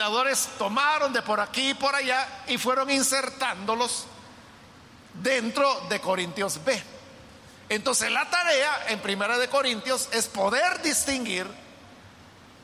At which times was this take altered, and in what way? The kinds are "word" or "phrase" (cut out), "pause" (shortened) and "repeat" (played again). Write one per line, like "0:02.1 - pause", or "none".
none